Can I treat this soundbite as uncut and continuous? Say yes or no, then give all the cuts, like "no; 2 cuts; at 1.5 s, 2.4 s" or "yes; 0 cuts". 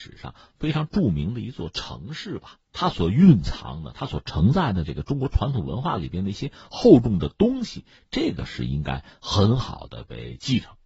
no; 1 cut; at 2.6 s